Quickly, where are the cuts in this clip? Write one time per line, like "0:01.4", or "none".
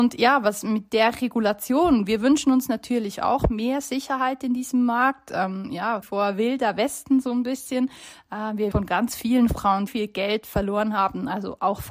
0:06.0
0:08.7
0:09.9